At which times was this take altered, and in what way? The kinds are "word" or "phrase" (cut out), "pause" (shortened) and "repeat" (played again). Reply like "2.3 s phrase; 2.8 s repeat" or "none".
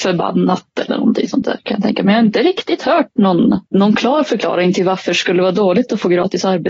3.7 s pause